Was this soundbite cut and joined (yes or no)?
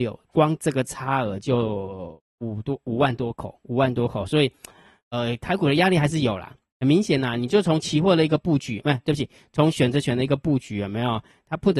no